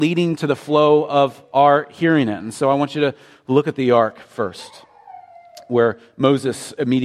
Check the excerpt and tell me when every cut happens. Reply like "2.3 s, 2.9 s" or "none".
none